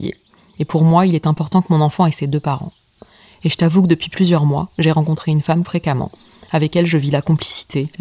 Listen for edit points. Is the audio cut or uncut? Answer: cut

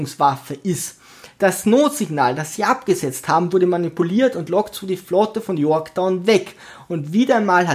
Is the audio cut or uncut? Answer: uncut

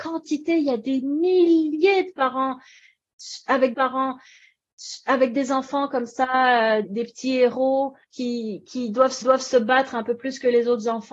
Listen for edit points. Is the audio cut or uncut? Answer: cut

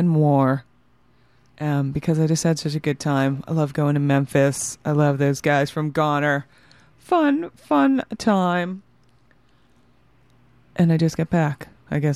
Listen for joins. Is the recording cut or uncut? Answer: uncut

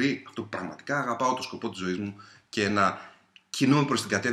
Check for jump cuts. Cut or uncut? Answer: uncut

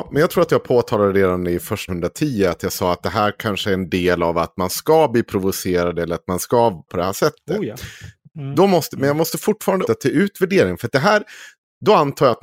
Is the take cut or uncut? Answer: cut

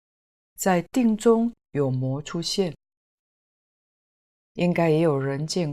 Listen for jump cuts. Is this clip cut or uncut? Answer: uncut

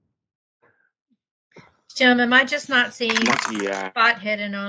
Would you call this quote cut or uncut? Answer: uncut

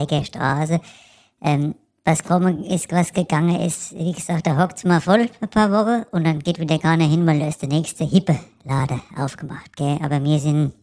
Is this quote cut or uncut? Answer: uncut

